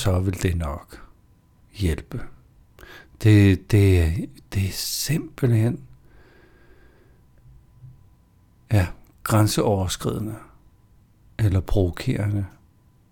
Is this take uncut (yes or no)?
yes